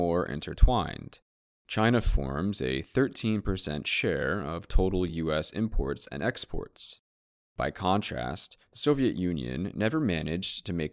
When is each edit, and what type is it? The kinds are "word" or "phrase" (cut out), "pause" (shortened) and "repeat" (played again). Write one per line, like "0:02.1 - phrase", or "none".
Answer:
none